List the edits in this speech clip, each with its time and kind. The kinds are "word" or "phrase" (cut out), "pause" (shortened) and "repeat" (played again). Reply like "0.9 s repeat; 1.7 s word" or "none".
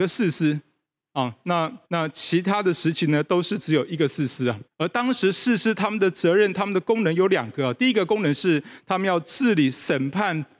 1.8 s pause; 4.7 s pause